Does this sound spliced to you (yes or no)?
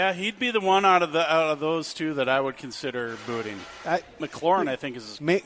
yes